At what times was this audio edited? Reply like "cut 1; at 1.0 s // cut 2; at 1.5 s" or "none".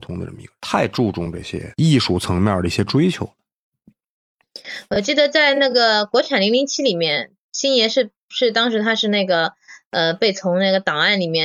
none